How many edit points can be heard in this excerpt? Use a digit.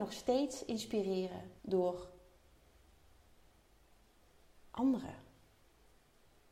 1